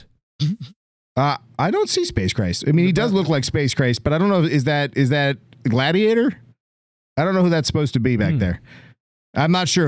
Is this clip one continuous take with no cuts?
yes; 0 cuts

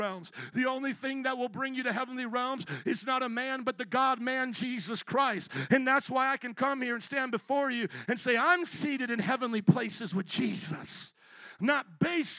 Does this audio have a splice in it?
no; 0 cuts

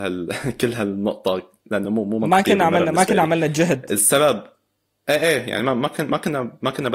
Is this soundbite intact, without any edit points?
yes; 0 cuts

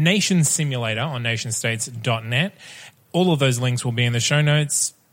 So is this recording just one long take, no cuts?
yes; 0 cuts

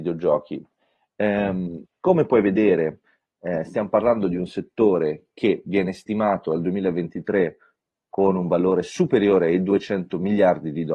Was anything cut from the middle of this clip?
no; 0 cuts

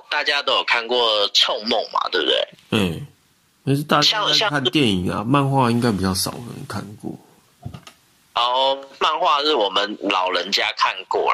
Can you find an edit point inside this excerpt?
yes; 2 cuts; at 2.5 s, 3.3 s

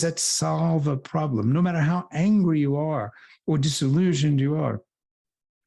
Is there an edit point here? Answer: no; 0 cuts

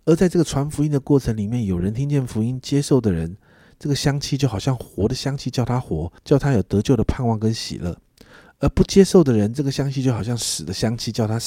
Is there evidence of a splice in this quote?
yes; 1 cut; at 6.2 s

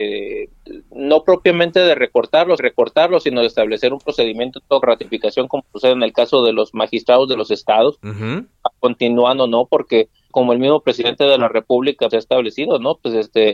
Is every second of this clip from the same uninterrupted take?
no; 5 cuts; at 2.6 s, 4.8 s, 8.8 s, 10.3 s, 12.1 s

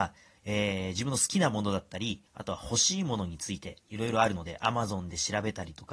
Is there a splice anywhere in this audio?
yes; 2 cuts; at 2.3 s, 3.8 s

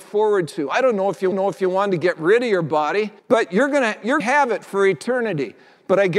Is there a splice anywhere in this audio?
yes; 3 cuts; at 1.3 s, 3.2 s, 4.2 s

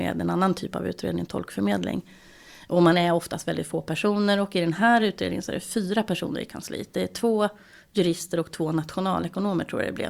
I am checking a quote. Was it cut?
no; 0 cuts

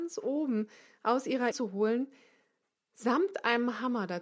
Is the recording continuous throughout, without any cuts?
no; 1 cut; at 1.5 s

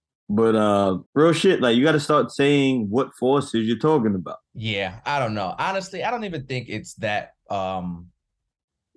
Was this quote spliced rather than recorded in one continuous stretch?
yes; 2 cuts; at 1.1 s, 4.4 s

